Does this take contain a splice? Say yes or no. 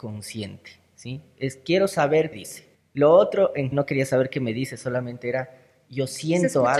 yes